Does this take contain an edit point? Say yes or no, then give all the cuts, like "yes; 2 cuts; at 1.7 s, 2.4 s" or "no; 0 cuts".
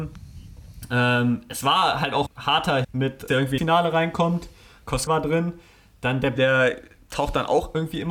yes; 6 cuts; at 2.3 s, 2.8 s, 3.3 s, 3.6 s, 5.1 s, 6.4 s